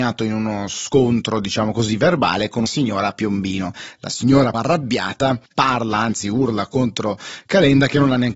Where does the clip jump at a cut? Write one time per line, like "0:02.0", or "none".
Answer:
0:02.7
0:04.5
0:05.5